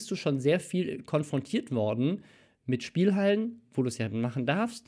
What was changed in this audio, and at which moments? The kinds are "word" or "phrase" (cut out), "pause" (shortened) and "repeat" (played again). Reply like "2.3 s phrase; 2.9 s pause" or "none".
none